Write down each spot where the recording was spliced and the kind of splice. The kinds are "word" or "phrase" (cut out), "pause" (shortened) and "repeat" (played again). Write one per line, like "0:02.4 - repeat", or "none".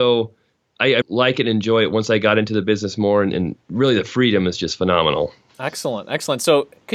0:01.0 - phrase
0:03.6 - pause